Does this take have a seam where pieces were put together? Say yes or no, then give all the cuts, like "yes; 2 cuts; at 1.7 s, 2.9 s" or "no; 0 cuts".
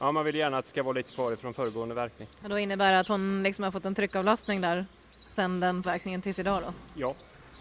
yes; 3 cuts; at 2.3 s, 5.4 s, 5.8 s